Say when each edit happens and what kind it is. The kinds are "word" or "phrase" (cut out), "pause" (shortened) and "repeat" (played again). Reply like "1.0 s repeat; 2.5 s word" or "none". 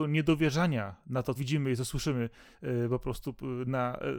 1.3 s phrase